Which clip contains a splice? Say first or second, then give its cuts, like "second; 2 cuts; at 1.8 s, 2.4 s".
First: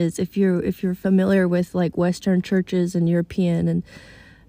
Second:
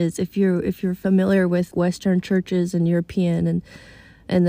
second; 1 cut; at 1.7 s